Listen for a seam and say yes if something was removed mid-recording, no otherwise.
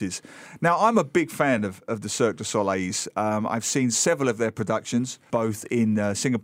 no